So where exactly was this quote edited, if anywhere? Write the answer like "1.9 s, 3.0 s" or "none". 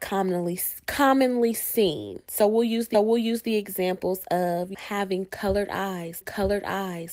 2.3 s, 2.9 s, 4.7 s, 6.2 s